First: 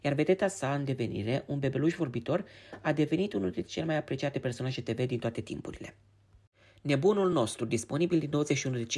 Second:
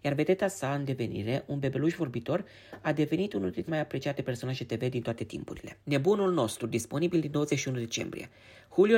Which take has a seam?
second; 2 cuts; at 3.7 s, 5.8 s

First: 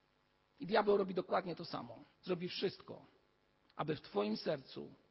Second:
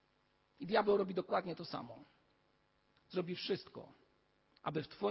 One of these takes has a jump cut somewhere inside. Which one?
first; 1 cut; at 2.1 s

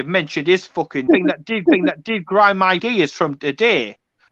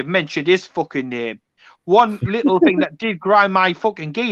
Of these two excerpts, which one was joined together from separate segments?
first; 3 cuts; at 1.1 s, 1.7 s, 2.8 s

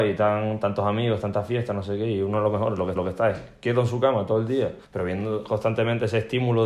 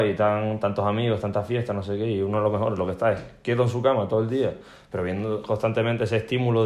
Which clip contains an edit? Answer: first; 2 cuts; at 2.9 s, 4.8 s

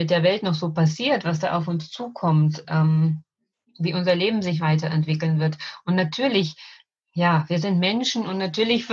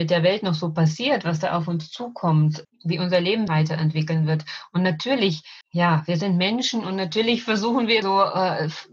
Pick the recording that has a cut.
second; 4 cuts; at 2.6 s, 3.5 s, 5.6 s, 8.0 s

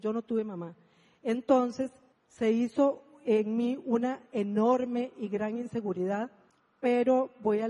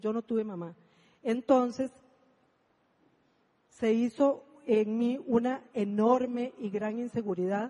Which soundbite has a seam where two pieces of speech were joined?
first; 2 cuts; at 2.1 s, 6.5 s

